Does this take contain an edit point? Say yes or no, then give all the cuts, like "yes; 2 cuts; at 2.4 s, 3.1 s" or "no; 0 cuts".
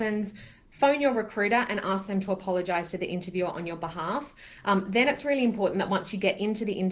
no; 0 cuts